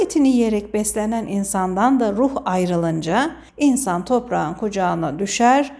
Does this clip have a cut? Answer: yes; 1 cut; at 3.5 s

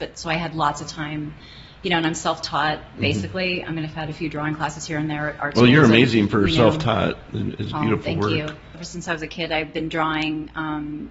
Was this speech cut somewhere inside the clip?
no; 0 cuts

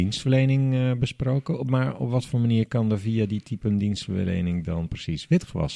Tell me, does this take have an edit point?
no; 0 cuts

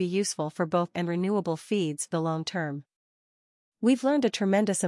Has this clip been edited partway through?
yes; 2 cuts; at 0.9 s, 2.1 s

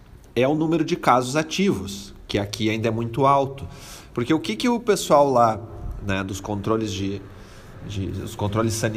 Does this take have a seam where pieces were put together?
no; 0 cuts

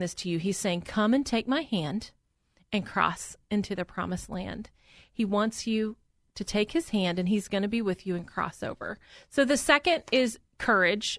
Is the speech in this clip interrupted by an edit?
no; 0 cuts

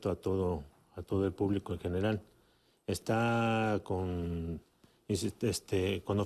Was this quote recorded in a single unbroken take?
yes; 0 cuts

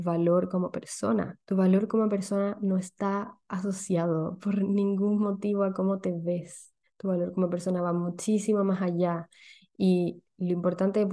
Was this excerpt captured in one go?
no; 2 cuts; at 1.4 s, 6.8 s

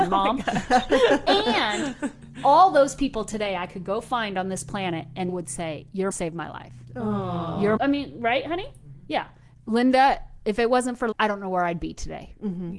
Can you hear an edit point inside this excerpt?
yes; 4 cuts; at 5.3 s, 6.1 s, 7.8 s, 11.1 s

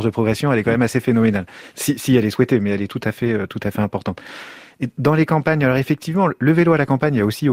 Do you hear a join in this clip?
no; 0 cuts

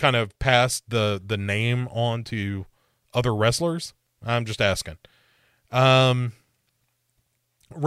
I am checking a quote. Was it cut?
no; 0 cuts

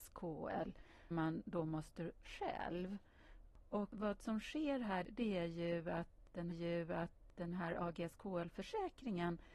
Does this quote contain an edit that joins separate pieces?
yes; 3 cuts; at 1.1 s, 2.2 s, 6.5 s

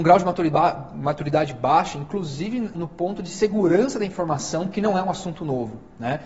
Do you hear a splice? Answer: yes; 1 cut; at 2.7 s

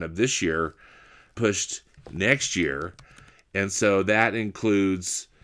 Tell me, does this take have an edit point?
yes; 2 cuts; at 1.3 s, 2.0 s

